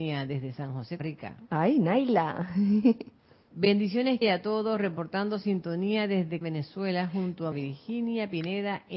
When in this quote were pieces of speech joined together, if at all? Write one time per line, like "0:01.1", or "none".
0:01.0
0:04.2
0:06.4
0:07.5